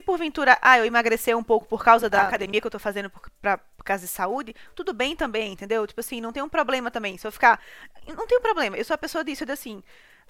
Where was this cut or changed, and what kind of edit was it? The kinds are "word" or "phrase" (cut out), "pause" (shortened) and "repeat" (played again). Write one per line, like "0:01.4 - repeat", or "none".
none